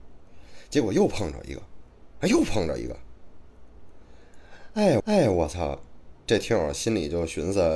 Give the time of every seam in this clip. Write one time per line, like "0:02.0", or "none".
0:02.1
0:05.0